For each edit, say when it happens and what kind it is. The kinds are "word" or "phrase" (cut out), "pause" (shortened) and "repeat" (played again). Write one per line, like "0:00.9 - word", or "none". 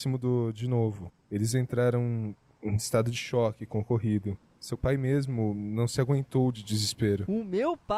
none